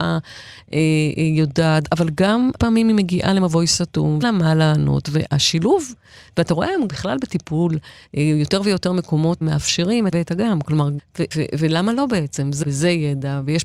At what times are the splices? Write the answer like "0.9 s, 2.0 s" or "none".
1.8 s, 2.6 s, 4.2 s, 6.9 s, 9.4 s, 10.1 s, 11.0 s, 11.3 s, 12.6 s